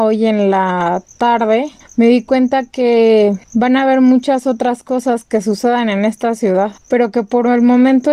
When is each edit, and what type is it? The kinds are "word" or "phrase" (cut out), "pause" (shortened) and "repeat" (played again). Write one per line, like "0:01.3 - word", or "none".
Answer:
0:01.8 - pause
0:03.4 - pause
0:06.8 - pause